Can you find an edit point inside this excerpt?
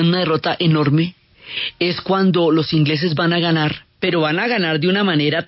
yes; 1 cut; at 3.9 s

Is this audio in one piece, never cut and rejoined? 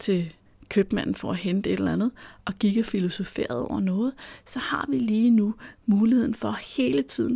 yes; 0 cuts

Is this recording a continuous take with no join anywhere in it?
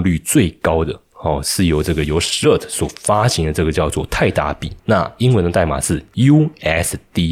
yes; 0 cuts

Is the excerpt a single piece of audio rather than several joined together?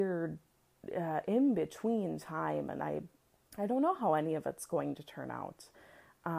no; 1 cut; at 3.3 s

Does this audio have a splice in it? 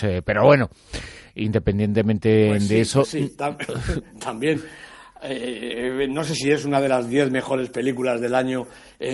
no; 0 cuts

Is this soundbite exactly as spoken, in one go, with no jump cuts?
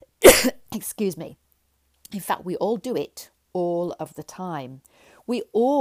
yes; 0 cuts

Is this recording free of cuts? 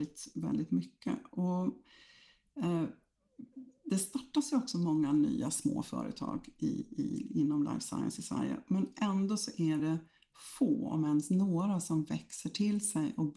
yes; 0 cuts

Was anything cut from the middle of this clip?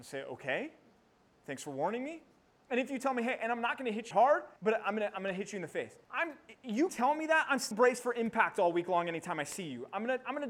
yes; 6 cuts; at 2.6 s, 4.1 s, 4.6 s, 6.0 s, 6.9 s, 7.7 s

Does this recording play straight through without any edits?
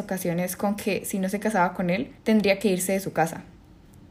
no; 1 cut; at 2.2 s

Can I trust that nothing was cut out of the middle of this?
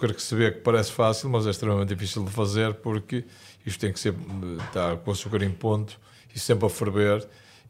yes; 0 cuts

